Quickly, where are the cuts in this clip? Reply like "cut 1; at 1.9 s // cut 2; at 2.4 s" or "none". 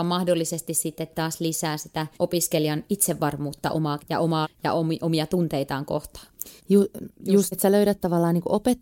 cut 1; at 2.1 s // cut 2; at 4.0 s // cut 3; at 4.4 s // cut 4; at 6.6 s // cut 5; at 7.5 s